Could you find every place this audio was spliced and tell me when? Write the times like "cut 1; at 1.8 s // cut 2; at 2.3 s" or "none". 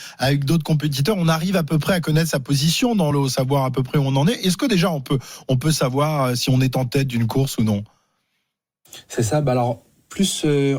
none